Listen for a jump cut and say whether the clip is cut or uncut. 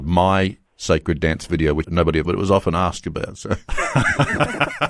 cut